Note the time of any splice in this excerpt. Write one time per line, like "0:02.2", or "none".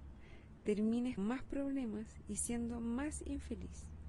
0:01.2